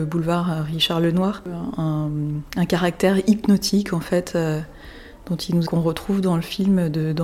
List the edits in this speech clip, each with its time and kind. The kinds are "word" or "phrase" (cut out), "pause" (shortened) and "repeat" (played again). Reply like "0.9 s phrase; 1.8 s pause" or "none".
5.7 s phrase